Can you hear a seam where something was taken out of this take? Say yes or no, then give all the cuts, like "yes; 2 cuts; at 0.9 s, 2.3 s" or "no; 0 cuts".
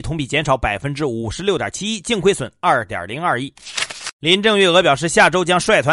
no; 0 cuts